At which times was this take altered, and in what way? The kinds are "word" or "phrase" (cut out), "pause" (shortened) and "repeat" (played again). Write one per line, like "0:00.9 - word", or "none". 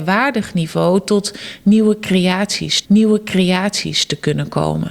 0:02.8 - repeat